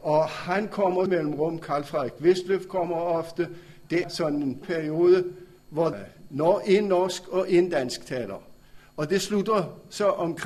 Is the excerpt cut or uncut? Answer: cut